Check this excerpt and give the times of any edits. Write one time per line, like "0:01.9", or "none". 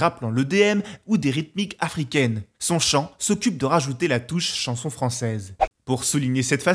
none